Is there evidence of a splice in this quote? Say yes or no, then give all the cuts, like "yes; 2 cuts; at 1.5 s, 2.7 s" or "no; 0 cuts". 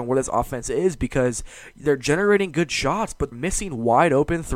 yes; 1 cut; at 3.3 s